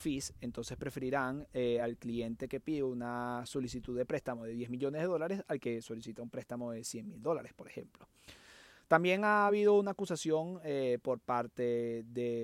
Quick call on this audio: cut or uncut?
uncut